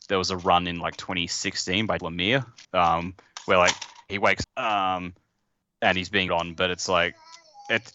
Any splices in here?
yes; 5 cuts; at 2.0 s, 2.6 s, 4.1 s, 4.4 s, 6.3 s

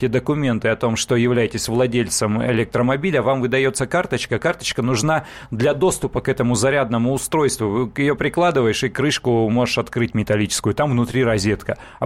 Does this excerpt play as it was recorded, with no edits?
no; 1 cut; at 8.2 s

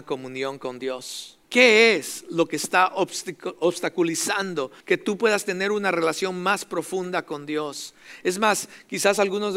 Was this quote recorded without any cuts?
no; 2 cuts; at 1.4 s, 4.8 s

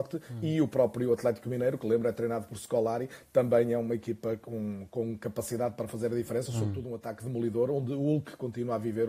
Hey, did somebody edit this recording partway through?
no; 0 cuts

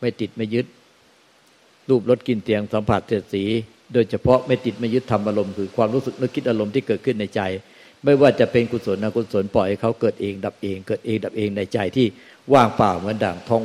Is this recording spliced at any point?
no; 0 cuts

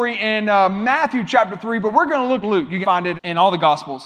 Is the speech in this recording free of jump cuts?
no; 3 cuts; at 2.4 s, 2.8 s, 3.2 s

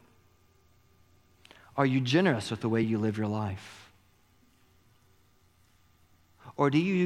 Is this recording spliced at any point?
no; 0 cuts

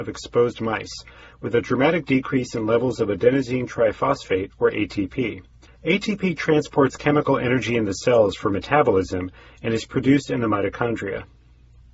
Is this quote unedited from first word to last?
yes; 0 cuts

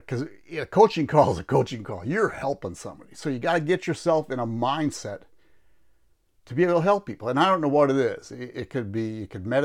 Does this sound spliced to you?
no; 0 cuts

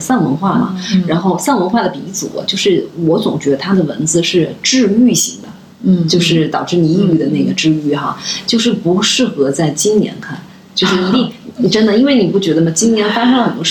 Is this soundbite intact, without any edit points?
yes; 0 cuts

